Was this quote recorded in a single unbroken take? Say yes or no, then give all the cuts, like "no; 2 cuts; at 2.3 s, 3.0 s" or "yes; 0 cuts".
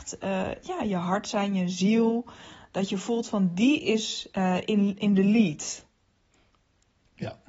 yes; 0 cuts